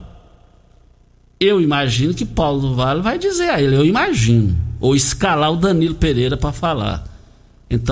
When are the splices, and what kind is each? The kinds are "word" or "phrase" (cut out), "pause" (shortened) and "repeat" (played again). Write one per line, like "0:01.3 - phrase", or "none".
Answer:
none